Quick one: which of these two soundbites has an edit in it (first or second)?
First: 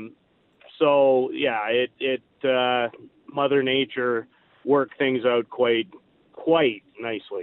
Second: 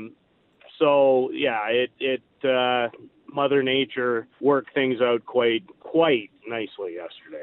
second